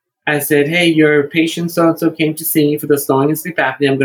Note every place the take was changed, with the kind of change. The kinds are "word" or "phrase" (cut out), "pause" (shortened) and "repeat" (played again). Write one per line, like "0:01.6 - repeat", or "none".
none